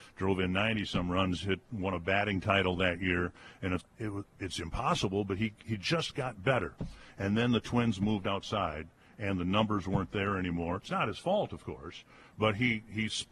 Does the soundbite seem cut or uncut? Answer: cut